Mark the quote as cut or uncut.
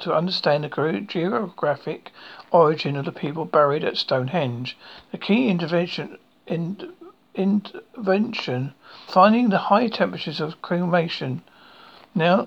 cut